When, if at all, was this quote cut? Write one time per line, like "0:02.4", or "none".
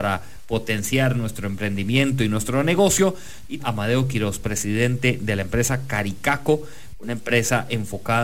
0:03.6